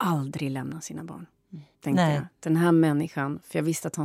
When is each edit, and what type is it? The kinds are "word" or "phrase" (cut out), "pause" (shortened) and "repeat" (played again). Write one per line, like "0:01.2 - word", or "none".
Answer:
0:01.7 - pause